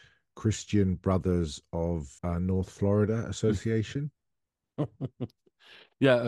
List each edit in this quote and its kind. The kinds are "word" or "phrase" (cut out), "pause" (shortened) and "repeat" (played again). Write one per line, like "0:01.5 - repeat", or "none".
0:02.2 - pause